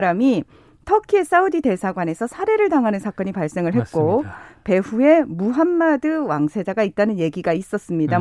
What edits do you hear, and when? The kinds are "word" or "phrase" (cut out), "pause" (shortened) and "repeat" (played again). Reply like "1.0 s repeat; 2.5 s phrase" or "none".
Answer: none